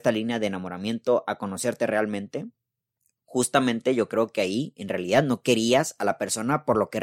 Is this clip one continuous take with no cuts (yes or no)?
yes